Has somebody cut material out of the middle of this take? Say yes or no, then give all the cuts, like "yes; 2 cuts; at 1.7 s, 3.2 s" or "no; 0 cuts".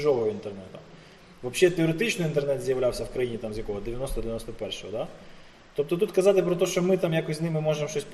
no; 0 cuts